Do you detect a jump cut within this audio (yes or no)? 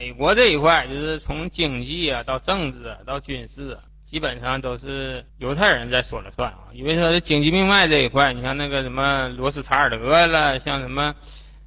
yes